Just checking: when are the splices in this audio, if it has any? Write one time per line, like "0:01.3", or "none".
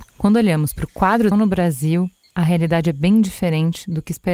0:01.3